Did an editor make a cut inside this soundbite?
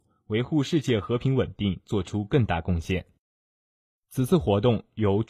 no; 0 cuts

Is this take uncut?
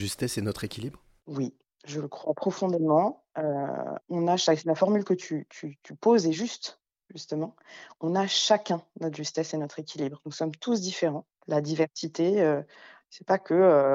yes; 0 cuts

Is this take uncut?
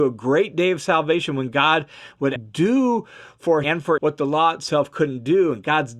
no; 3 cuts; at 2.4 s, 3.6 s, 4.0 s

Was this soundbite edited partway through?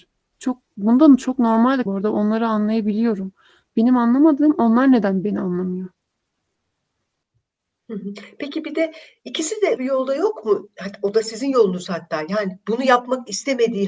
yes; 2 cuts; at 1.9 s, 9.8 s

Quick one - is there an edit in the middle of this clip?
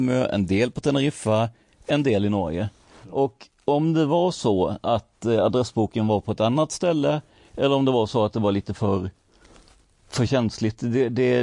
no; 0 cuts

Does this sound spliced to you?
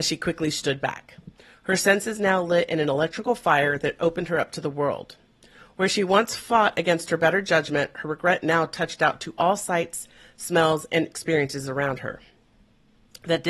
no; 0 cuts

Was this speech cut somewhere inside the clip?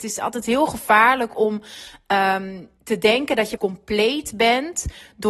yes; 2 cuts; at 2.8 s, 3.6 s

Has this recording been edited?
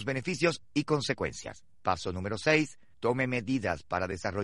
yes; 2 cuts; at 1.7 s, 2.9 s

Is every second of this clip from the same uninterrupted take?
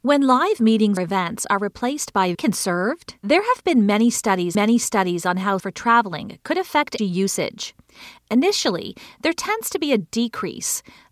no; 6 cuts; at 1.0 s, 2.3 s, 3.2 s, 4.5 s, 5.6 s, 7.0 s

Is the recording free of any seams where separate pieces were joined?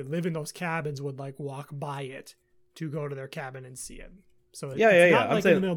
yes; 0 cuts

